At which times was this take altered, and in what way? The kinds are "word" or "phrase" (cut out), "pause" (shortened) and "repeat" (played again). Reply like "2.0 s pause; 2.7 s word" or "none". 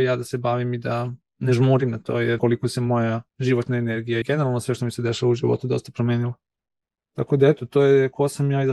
2.4 s word; 3.3 s pause; 4.2 s word